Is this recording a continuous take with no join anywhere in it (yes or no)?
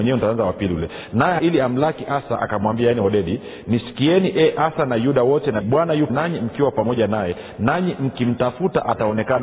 no